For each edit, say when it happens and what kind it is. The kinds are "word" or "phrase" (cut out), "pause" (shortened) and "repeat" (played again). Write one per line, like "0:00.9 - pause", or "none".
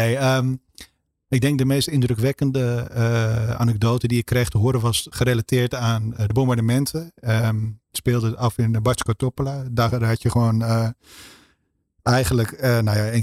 0:05.1 - word
0:07.9 - word